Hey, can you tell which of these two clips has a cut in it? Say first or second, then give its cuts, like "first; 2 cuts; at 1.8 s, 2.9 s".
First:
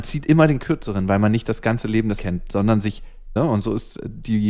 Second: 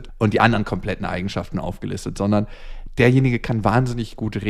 first; 2 cuts; at 2.2 s, 3.4 s